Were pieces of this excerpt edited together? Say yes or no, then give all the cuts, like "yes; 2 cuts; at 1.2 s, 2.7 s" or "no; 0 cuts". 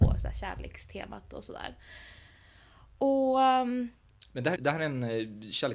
yes; 1 cut; at 4.6 s